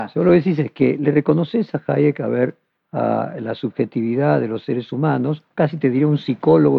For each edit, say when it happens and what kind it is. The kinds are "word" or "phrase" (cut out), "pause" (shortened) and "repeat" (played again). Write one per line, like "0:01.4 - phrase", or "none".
0:02.7 - phrase